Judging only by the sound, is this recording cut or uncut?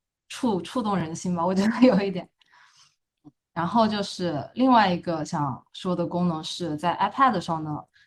uncut